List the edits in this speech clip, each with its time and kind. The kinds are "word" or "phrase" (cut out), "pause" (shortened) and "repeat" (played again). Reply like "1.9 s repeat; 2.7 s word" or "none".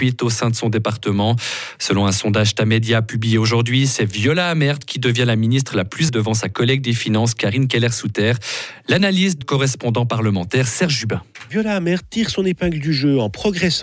6.1 s word; 9.4 s word